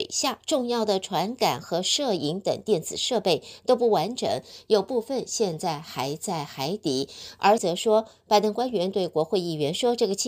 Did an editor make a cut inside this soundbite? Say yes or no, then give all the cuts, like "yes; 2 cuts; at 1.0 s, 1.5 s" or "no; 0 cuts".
yes; 1 cut; at 7.6 s